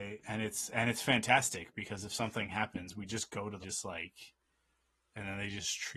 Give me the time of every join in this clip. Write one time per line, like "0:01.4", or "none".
0:03.6